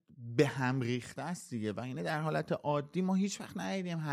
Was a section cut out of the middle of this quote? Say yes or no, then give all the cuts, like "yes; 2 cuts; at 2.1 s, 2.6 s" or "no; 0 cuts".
no; 0 cuts